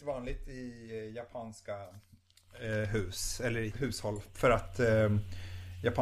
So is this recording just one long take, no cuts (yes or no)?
no